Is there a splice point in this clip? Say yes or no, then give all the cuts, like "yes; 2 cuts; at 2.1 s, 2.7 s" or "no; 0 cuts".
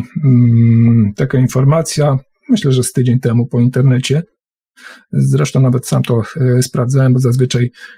no; 0 cuts